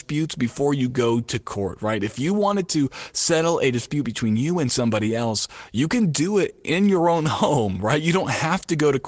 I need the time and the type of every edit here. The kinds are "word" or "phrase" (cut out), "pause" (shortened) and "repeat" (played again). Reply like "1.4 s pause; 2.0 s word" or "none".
none